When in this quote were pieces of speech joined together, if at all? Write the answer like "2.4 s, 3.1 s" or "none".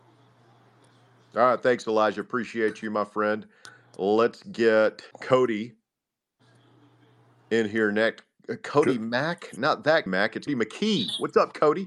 5.1 s, 10.1 s, 10.5 s